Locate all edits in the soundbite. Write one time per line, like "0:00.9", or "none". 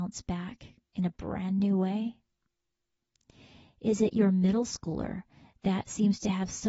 none